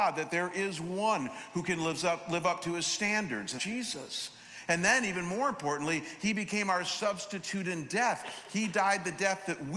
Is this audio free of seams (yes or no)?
no